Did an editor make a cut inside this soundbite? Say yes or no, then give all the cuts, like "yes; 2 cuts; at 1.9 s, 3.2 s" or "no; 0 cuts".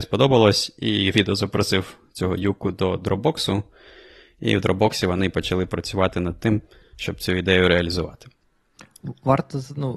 no; 0 cuts